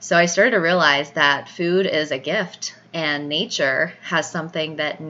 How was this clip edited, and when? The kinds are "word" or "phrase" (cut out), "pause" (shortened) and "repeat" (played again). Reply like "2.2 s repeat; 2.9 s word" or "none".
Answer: none